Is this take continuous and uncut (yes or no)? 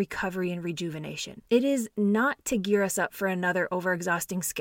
yes